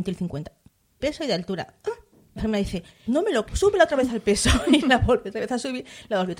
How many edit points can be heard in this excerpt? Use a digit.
4